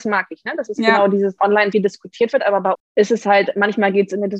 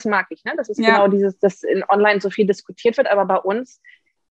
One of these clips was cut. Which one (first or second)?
first